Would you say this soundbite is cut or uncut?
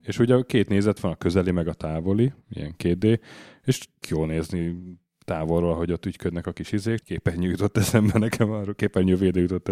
cut